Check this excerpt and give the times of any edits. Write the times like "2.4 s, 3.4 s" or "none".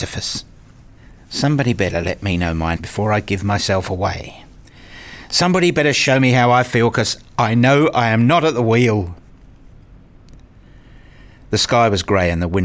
1.0 s, 2.8 s